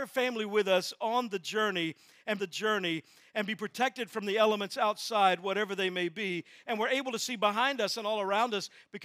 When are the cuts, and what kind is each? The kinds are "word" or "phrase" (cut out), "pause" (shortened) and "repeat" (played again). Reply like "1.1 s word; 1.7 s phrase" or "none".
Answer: 2.4 s repeat